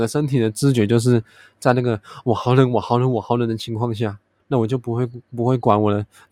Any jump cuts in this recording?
no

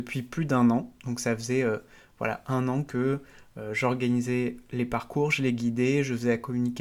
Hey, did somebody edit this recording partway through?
no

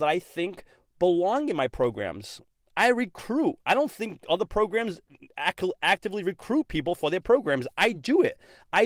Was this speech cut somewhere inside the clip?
no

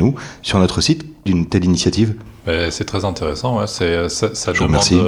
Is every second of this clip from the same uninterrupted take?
no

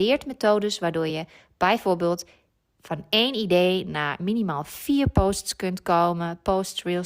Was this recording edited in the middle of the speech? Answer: no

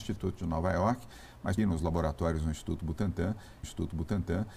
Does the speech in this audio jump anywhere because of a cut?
yes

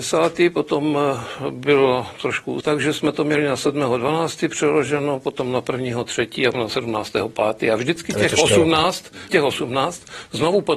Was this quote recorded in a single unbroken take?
no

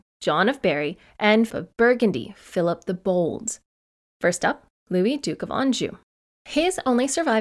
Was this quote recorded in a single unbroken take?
no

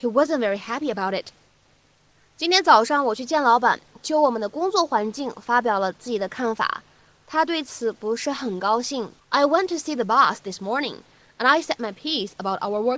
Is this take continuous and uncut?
no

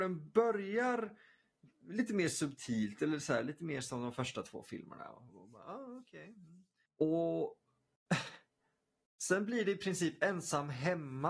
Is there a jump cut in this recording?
no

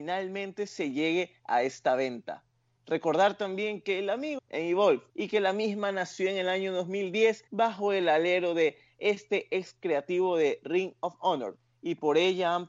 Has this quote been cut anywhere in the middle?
yes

